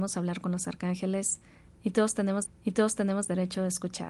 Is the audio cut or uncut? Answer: cut